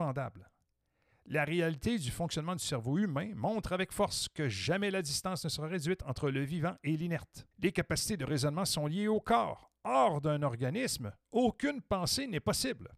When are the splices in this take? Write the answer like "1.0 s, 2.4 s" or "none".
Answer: 7.5 s